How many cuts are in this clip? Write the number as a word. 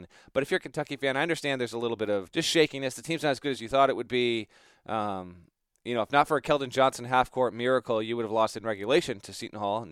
one